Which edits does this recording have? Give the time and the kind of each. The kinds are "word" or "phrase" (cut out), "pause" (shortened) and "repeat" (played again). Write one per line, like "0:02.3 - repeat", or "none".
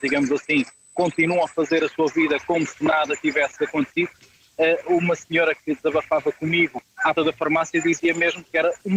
0:07.2 - word

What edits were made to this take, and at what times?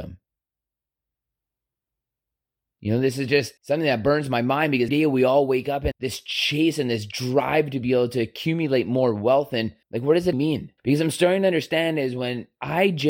0:03.6 - pause
0:04.9 - word
0:05.9 - word
0:09.8 - pause
0:10.3 - word
0:10.8 - pause

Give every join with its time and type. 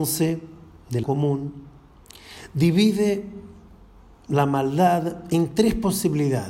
0:01.0 - word

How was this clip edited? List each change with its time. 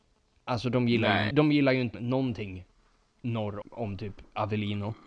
0:01.3 - word
0:01.9 - word
0:03.6 - word

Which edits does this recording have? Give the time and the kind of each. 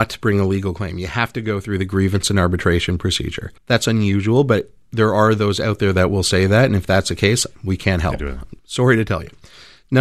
0:03.6 - pause
0:07.5 - pause
0:08.6 - pause

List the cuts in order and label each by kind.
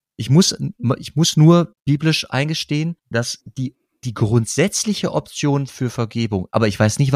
0:03.0 - pause
0:03.8 - pause

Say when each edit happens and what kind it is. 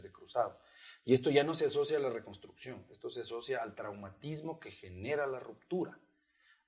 none

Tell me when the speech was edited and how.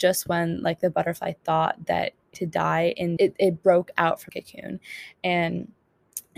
0:02.3 - phrase
0:03.2 - phrase
0:04.3 - word

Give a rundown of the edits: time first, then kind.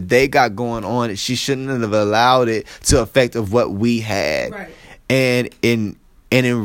none

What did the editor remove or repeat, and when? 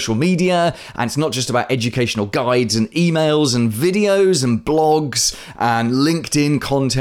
none

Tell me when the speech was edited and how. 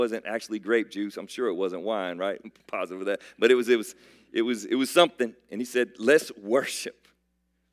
0:02.4 - word

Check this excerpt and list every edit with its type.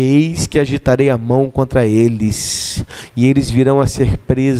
none

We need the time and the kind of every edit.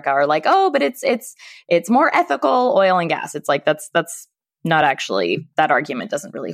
none

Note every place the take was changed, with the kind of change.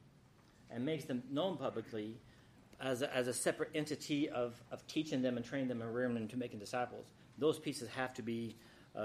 0:02.6 - pause

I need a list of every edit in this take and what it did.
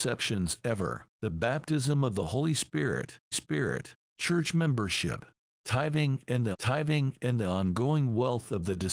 0:01.1 - pause
0:03.3 - repeat
0:06.5 - repeat

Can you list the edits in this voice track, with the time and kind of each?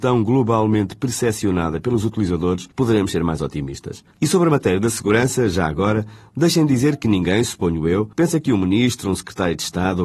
0:02.7 - pause
0:04.1 - pause
0:08.1 - pause

